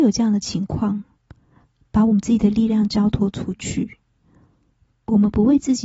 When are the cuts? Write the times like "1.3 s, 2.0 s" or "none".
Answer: none

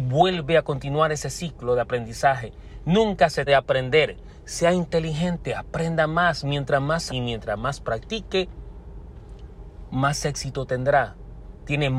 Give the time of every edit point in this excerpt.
3.5 s, 7.1 s

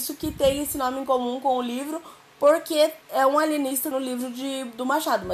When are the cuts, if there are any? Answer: 3.0 s, 3.9 s

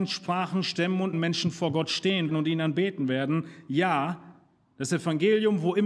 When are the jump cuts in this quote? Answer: 1.1 s, 2.3 s

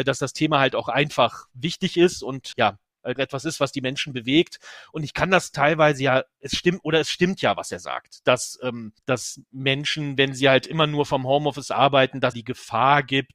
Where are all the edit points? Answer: 2.5 s, 3.2 s, 9.0 s, 12.3 s

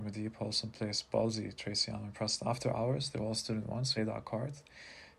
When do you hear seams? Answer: 4.0 s

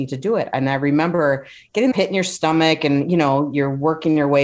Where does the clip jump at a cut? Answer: 1.9 s

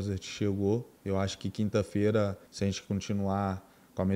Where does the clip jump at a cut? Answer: 1.0 s, 2.5 s

